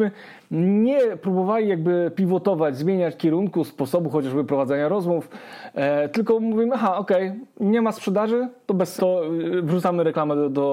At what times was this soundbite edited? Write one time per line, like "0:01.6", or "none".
0:03.2
0:06.1
0:09.0

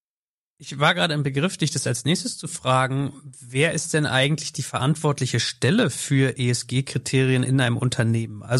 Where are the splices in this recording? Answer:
none

